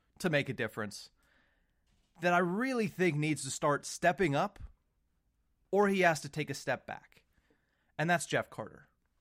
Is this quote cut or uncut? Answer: uncut